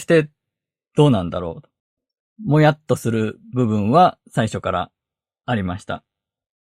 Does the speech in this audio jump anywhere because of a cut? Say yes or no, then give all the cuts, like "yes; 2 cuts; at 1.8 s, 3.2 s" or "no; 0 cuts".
yes; 1 cut; at 4.2 s